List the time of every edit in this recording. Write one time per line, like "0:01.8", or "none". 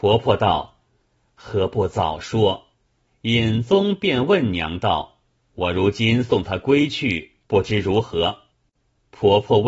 0:02.7
0:05.3
0:07.4
0:08.5